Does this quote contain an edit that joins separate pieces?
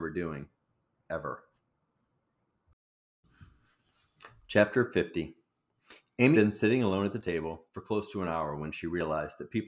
yes; 1 cut; at 6.3 s

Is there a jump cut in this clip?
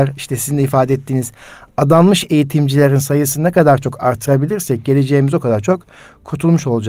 no; 0 cuts

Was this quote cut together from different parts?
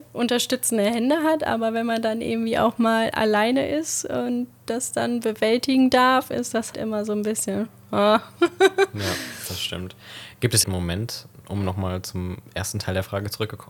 yes; 2 cuts; at 6.7 s, 10.6 s

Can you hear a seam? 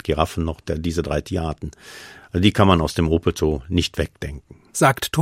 no; 0 cuts

